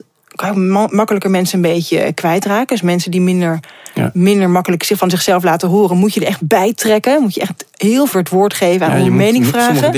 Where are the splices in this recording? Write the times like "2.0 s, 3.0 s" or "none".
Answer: 8.1 s